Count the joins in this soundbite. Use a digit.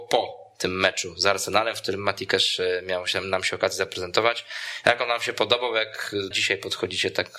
1